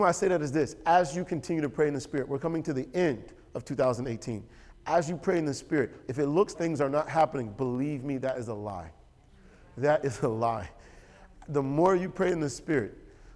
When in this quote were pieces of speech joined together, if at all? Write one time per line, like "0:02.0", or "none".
0:06.6